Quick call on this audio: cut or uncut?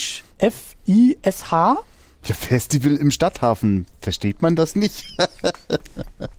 uncut